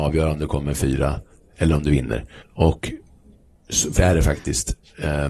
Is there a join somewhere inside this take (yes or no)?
yes